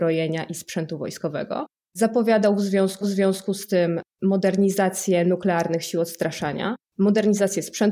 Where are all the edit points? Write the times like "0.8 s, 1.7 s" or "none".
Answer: 3.0 s